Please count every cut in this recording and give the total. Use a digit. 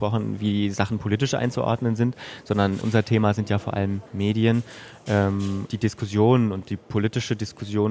3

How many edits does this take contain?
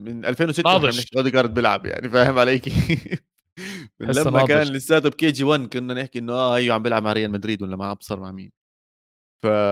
0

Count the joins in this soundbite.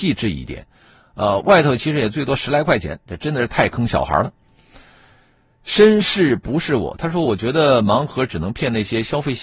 0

